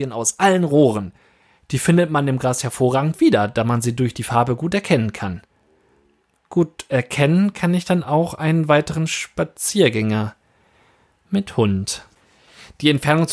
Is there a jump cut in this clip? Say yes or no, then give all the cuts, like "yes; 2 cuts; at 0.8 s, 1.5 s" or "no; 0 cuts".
no; 0 cuts